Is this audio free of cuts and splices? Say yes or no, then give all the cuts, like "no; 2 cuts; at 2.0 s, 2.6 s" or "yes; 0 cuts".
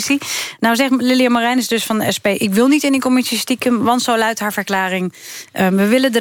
yes; 0 cuts